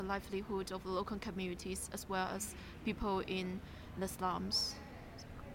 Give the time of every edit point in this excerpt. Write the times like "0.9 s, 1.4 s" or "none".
none